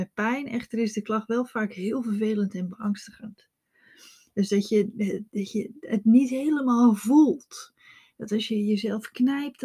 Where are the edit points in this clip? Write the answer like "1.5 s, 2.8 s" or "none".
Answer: none